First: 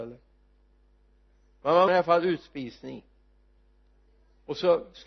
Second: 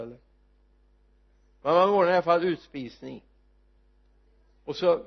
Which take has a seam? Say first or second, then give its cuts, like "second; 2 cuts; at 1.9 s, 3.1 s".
first; 1 cut; at 1.9 s